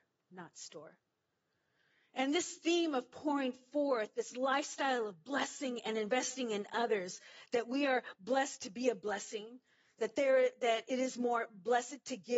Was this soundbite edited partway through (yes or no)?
no